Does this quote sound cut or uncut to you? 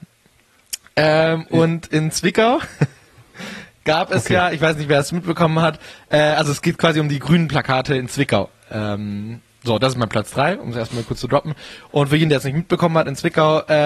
uncut